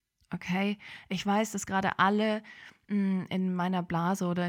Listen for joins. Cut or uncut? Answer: uncut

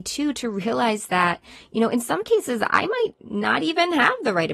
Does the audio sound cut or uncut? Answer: uncut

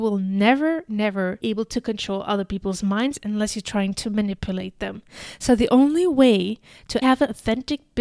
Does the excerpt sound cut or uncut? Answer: cut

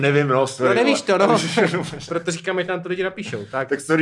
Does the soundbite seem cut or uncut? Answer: uncut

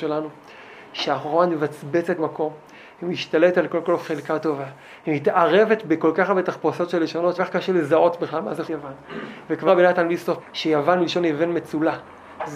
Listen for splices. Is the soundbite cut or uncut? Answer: cut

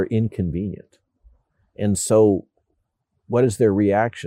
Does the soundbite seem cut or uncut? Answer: uncut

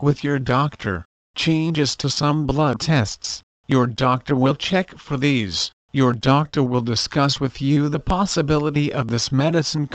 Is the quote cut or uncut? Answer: cut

